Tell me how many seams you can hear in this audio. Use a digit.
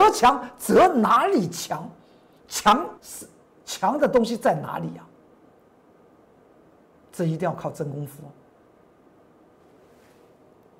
1